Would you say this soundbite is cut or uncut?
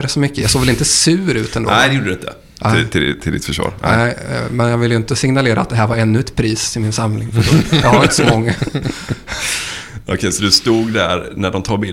uncut